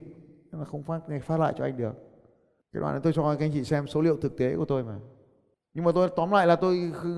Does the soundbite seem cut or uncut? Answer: uncut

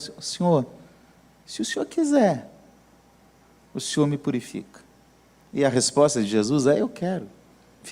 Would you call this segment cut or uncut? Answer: uncut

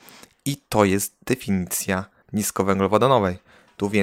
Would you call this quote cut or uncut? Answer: cut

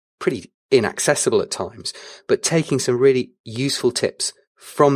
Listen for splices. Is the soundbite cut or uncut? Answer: uncut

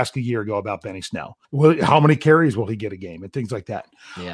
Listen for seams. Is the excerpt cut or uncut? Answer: cut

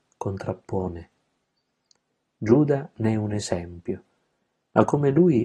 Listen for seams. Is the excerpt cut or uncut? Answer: uncut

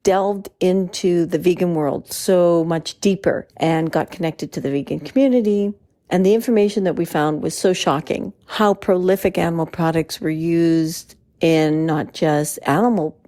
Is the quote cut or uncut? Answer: cut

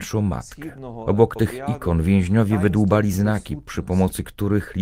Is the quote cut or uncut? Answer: uncut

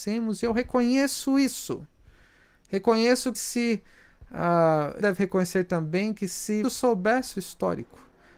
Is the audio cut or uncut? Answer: cut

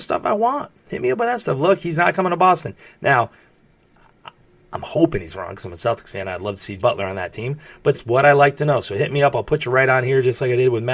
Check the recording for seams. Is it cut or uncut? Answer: cut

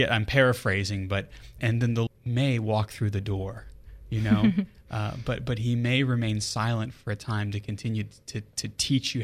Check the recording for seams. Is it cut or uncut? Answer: cut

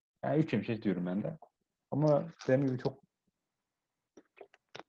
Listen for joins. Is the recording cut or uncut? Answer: uncut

